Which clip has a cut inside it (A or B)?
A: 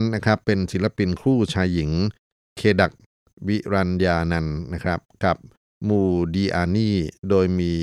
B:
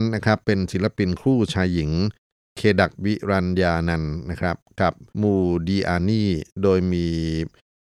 B